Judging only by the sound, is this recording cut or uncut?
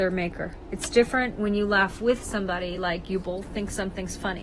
uncut